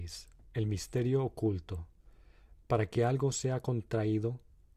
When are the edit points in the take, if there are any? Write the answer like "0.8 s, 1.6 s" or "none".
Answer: none